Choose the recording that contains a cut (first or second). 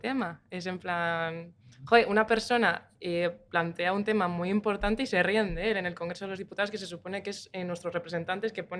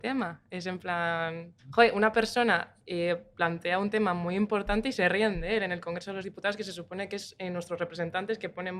second